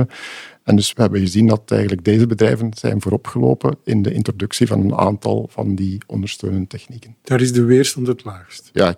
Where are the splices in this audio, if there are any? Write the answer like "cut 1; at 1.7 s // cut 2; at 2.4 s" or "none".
cut 1; at 0.9 s